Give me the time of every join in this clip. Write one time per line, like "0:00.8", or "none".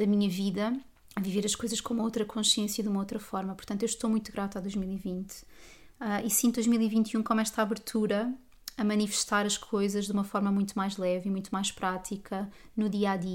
0:01.0